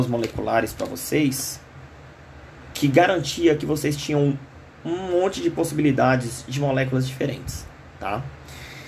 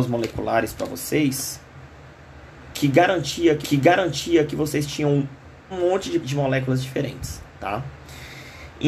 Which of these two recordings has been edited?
second; 4 cuts; at 3.6 s, 5.7 s, 6.2 s, 7.5 s

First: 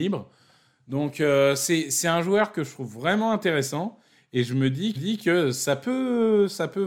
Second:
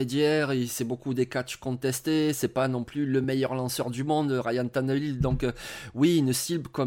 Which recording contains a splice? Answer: first; 1 cut; at 4.9 s

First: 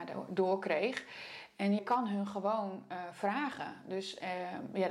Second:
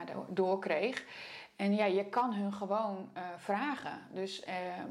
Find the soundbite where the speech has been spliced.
first; 1 cut; at 1.8 s

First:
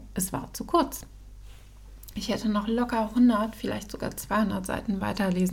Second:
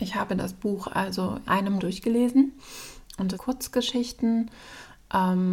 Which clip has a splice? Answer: second; 3 cuts; at 1.4 s, 1.8 s, 3.3 s

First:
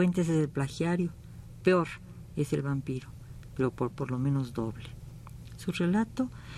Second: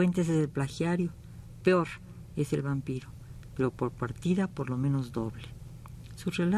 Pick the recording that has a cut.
first; 1 cut; at 3.9 s

